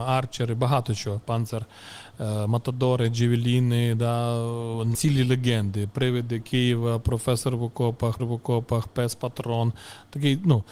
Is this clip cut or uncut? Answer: cut